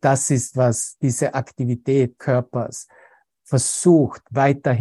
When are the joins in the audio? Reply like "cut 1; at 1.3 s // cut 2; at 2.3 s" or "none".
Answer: cut 1; at 2.2 s